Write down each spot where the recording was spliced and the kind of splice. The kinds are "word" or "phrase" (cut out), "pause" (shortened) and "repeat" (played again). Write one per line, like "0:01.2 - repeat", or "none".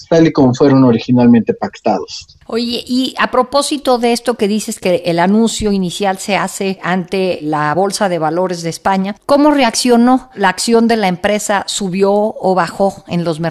none